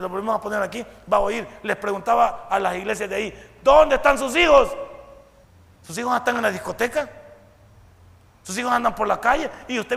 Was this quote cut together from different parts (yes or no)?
yes